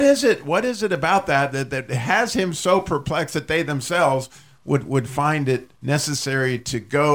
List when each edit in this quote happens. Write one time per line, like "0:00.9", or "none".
0:05.7